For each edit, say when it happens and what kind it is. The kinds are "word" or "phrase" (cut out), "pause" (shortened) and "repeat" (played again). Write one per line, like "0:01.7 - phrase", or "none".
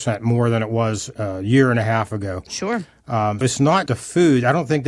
0:01.1 - word
0:03.4 - word
0:03.9 - word